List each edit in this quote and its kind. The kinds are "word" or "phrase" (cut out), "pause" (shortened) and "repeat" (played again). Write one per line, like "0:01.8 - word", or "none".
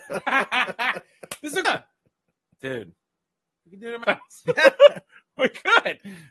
0:01.6 - word
0:04.0 - word